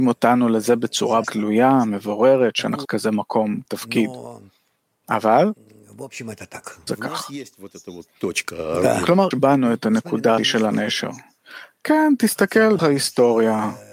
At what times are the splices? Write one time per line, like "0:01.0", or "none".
0:01.2
0:02.8
0:03.6
0:06.9
0:09.3
0:10.4
0:12.8

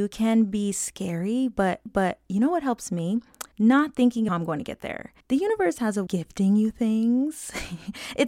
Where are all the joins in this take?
0:01.9
0:03.5
0:04.3
0:05.2
0:06.1

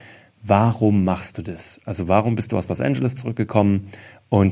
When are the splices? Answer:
none

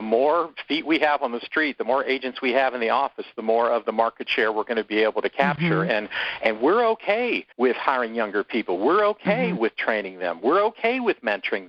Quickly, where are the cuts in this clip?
0:07.5

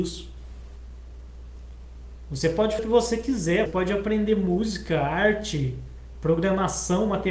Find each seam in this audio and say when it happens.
0:02.8
0:03.7

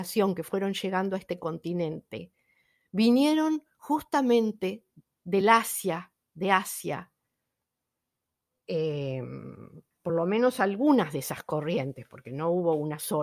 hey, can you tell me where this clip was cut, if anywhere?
none

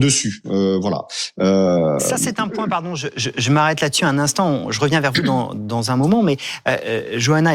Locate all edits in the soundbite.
none

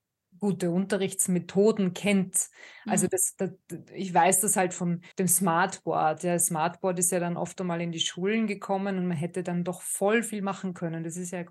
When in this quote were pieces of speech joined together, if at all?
0:05.1

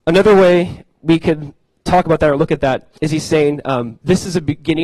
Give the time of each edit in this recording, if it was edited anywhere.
0:03.0

